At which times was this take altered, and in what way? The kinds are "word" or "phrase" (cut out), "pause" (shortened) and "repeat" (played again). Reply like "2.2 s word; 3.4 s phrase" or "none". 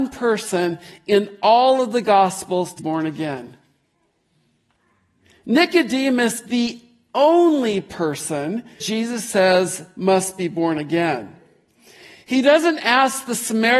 2.8 s word; 6.4 s word; 8.8 s word